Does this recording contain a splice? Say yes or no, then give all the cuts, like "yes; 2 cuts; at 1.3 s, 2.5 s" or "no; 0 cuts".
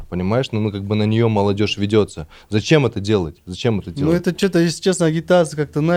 no; 0 cuts